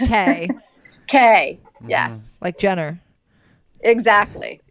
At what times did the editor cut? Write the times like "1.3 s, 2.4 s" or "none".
none